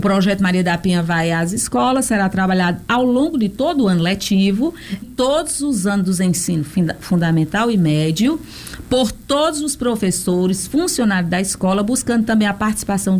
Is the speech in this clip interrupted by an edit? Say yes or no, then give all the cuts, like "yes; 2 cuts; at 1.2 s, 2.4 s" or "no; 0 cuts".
yes; 1 cut; at 5.0 s